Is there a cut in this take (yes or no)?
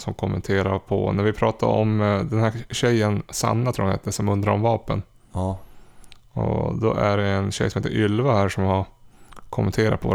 no